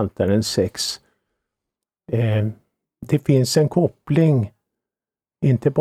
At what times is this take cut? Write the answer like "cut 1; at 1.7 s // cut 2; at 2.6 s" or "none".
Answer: none